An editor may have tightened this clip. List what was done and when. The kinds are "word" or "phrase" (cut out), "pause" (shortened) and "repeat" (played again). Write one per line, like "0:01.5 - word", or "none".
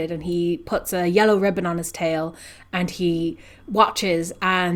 none